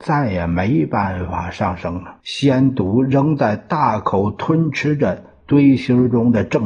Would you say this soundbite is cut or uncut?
cut